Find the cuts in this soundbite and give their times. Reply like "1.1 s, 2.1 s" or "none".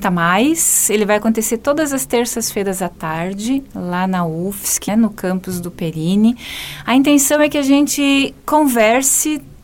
4.9 s